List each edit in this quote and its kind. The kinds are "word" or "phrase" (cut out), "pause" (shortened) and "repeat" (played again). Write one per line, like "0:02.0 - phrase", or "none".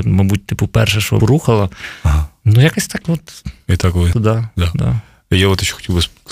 0:01.2 - phrase
0:04.1 - word